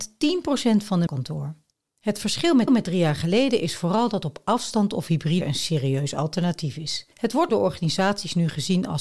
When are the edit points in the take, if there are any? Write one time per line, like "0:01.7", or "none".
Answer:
0:01.1
0:02.7
0:05.4
0:07.1
0:07.5